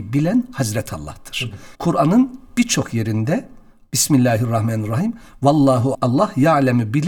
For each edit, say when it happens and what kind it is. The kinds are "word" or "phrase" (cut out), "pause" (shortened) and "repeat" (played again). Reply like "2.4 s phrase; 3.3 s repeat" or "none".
1.7 s pause; 3.9 s word; 5.9 s word